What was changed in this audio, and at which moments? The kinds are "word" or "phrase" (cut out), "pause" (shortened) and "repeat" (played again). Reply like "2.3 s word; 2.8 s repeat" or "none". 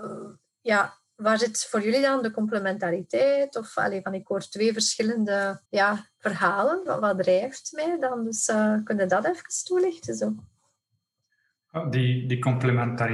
5.6 s pause; 6.9 s phrase